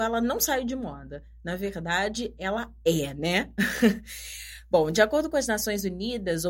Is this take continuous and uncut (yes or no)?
yes